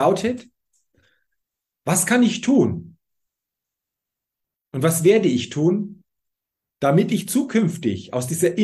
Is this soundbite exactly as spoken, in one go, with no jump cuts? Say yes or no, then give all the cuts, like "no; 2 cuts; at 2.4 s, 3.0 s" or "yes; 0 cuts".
yes; 0 cuts